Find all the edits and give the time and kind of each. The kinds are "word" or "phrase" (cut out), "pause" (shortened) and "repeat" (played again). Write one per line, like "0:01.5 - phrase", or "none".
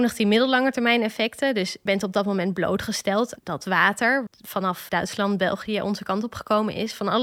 0:01.9 - word
0:03.4 - word
0:04.3 - word
0:04.9 - word